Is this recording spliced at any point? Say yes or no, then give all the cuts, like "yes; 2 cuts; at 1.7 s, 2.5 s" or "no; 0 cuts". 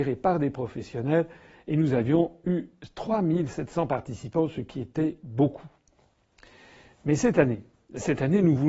no; 0 cuts